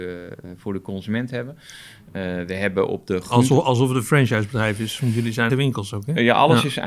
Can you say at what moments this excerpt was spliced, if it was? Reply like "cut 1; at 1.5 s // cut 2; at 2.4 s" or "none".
cut 1; at 5.5 s